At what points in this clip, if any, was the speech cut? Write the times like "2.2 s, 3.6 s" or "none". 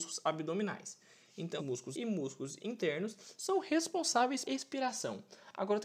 1.6 s, 1.9 s, 2.6 s, 4.4 s